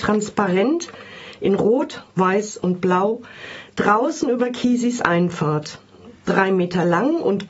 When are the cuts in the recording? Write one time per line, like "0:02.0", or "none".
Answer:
none